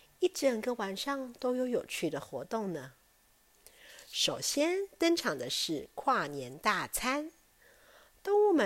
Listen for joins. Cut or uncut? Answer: uncut